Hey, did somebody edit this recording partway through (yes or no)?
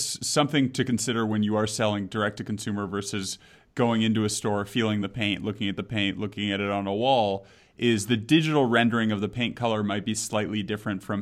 no